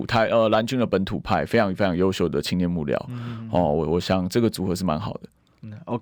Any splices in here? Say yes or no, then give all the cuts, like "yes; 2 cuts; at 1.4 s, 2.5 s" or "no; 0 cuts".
no; 0 cuts